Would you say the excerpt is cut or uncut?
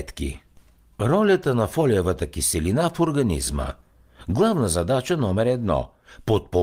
uncut